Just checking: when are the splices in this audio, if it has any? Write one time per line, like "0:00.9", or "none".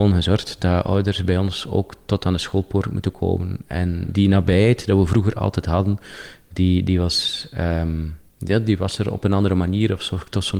0:08.3